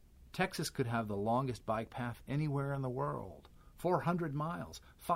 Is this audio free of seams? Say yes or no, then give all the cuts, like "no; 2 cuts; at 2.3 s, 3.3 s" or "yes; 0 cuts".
yes; 0 cuts